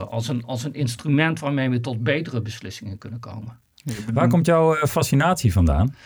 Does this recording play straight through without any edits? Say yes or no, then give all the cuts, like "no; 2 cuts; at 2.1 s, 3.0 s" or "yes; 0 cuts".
yes; 0 cuts